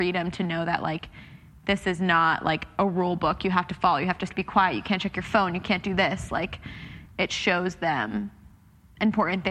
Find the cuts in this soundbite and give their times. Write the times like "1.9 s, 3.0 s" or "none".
4.3 s